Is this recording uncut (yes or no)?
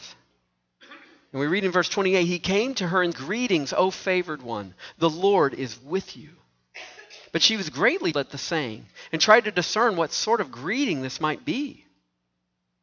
no